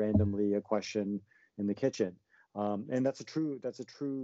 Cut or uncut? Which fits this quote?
uncut